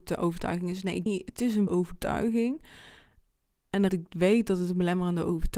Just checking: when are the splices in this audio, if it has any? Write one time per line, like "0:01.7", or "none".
0:01.1
0:01.7
0:03.9

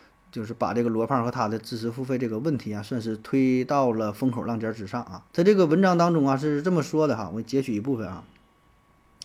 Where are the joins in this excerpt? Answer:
0:05.3

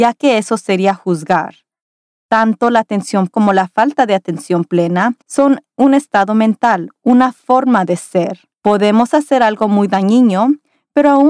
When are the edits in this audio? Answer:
0:03.3
0:05.2
0:08.5

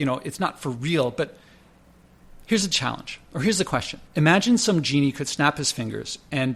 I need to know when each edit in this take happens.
0:04.1

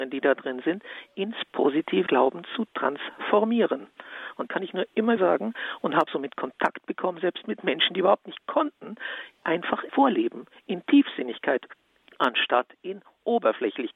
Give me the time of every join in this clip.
0:02.1
0:04.5
0:05.2
0:06.1
0:08.4
0:09.9

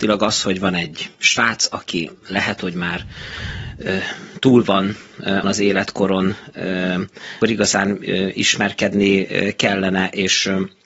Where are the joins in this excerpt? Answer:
0:01.2
0:05.4
0:07.4

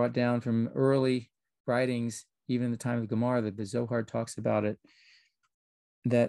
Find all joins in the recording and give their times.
none

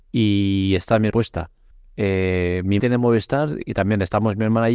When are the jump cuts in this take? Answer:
0:01.1
0:01.7
0:02.8

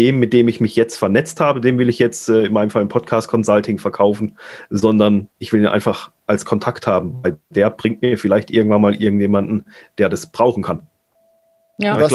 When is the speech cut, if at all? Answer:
none

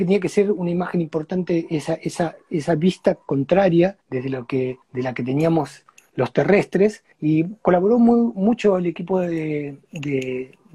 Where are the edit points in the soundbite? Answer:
0:04.0
0:04.8
0:07.1

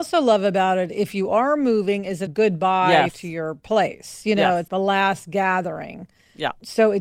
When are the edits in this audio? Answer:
0:02.3
0:04.7

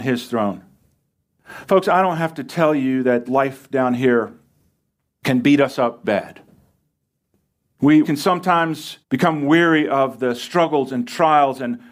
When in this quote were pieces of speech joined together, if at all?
0:03.3
0:06.0
0:08.0
0:09.0

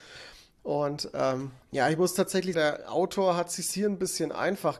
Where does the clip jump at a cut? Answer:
0:01.6
0:02.5

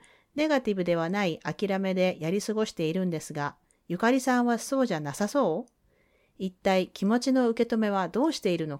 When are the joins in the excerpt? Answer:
none

